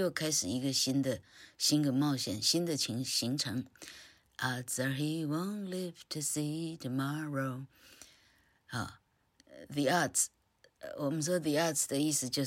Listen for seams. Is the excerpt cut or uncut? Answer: uncut